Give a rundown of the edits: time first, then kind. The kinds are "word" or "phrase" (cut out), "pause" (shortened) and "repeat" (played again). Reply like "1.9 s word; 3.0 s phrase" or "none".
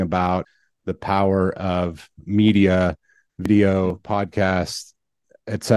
none